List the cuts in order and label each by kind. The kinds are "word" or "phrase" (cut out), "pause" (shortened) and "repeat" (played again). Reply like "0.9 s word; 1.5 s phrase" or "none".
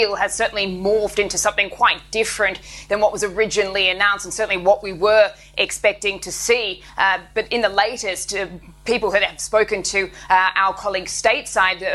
none